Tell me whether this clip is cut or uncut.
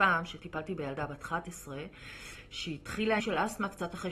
cut